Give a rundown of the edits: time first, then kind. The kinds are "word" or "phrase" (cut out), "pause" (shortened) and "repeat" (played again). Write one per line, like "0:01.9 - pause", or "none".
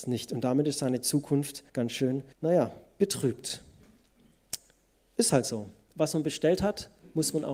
0:01.7 - pause
0:02.3 - pause
0:04.9 - pause